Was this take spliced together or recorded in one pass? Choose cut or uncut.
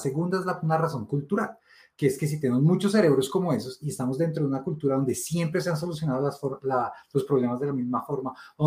uncut